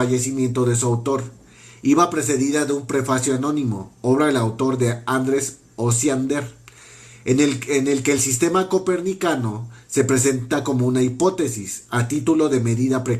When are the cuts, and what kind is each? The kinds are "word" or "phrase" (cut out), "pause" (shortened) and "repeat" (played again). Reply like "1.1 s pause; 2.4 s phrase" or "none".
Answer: none